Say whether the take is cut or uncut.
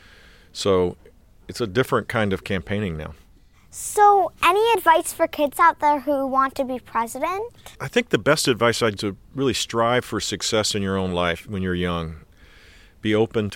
cut